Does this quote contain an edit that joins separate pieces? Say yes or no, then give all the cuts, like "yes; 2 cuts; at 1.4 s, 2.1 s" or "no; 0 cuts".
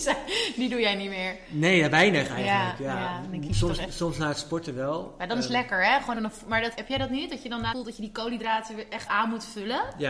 yes; 4 cuts; at 6.1 s, 6.7 s, 7.7 s, 9.1 s